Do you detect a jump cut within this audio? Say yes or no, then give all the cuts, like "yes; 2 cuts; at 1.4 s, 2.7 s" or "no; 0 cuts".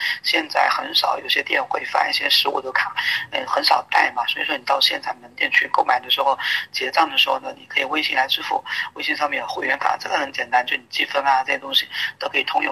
no; 0 cuts